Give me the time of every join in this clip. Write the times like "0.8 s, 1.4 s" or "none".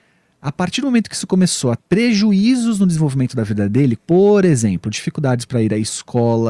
1.8 s, 4.0 s